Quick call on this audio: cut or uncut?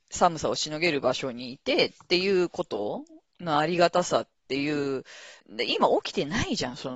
cut